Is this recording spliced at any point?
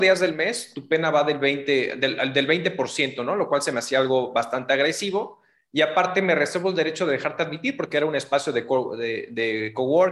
no; 0 cuts

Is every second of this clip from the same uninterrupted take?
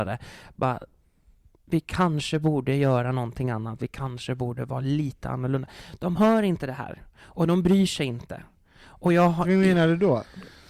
yes; 0 cuts

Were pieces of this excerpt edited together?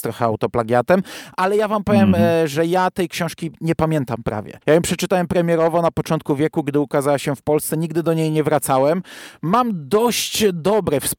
yes; 1 cut; at 4.6 s

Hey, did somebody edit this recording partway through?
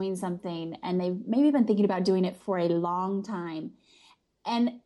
no; 0 cuts

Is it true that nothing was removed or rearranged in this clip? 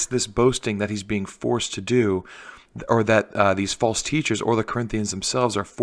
yes; 0 cuts

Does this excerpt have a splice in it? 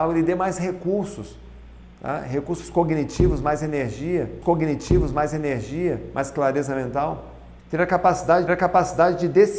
yes; 4 cuts; at 1.9 s, 4.4 s, 7.6 s, 8.5 s

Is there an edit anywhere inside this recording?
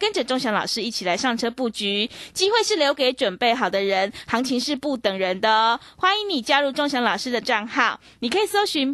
yes; 1 cut; at 7.4 s

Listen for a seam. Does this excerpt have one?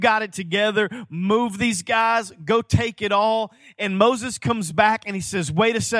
no; 0 cuts

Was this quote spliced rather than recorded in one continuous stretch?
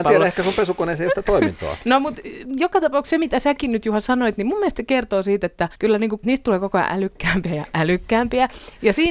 yes; 2 cuts; at 5.8 s, 6.2 s

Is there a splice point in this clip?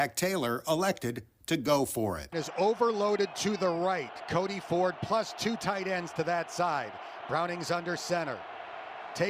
yes; 1 cut; at 2.3 s

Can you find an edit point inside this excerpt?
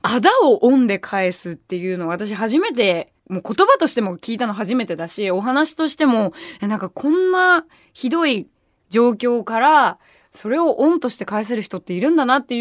yes; 1 cut; at 3.2 s

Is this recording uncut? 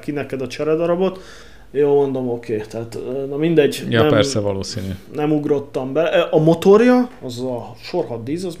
yes; 0 cuts

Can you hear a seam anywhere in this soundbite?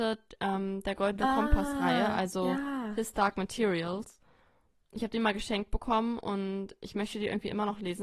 no; 0 cuts

